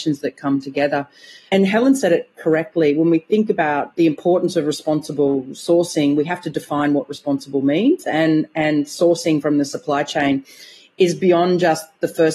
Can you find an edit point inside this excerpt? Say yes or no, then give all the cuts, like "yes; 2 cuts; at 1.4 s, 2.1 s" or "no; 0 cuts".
no; 0 cuts